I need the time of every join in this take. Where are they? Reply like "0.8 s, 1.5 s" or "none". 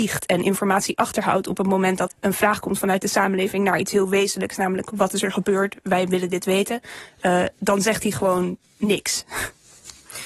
2.1 s